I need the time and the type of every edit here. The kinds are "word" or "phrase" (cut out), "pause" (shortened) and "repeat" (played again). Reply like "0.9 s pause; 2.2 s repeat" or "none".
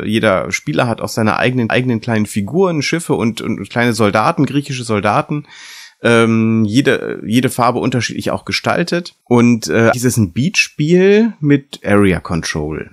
1.7 s repeat; 9.2 s pause; 9.9 s word